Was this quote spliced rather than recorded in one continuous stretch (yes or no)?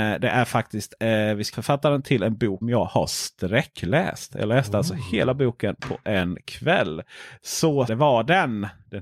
yes